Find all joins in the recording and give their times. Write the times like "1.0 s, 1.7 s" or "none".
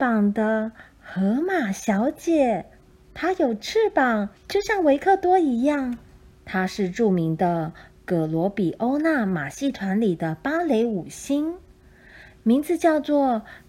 2.9 s, 4.4 s, 6.3 s